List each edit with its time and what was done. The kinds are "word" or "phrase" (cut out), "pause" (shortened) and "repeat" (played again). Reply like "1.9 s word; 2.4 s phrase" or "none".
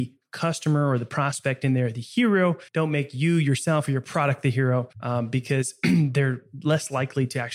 2.7 s pause; 4.9 s pause